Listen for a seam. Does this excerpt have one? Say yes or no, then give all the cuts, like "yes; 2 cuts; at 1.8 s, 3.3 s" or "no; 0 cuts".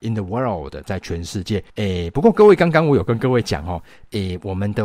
yes; 1 cut; at 1.7 s